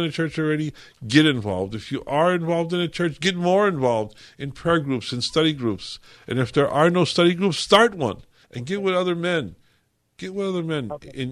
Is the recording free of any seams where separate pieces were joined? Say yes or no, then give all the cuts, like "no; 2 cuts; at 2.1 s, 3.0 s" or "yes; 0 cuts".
no; 1 cut; at 8.4 s